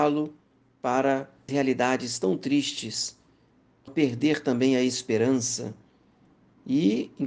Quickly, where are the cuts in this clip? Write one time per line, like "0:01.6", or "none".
0:01.5
0:03.9